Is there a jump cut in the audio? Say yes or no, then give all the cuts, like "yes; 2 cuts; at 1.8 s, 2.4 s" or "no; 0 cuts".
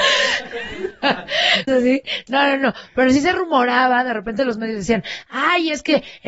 yes; 1 cut; at 1.7 s